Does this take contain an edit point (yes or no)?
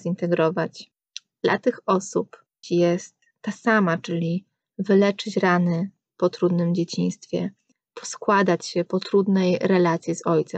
yes